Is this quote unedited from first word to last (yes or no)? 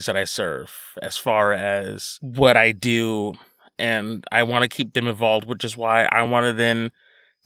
yes